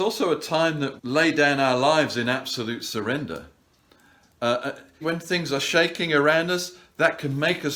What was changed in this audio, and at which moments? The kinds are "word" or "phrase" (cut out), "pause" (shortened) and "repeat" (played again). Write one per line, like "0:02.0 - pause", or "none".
0:01.0 - word
0:05.0 - word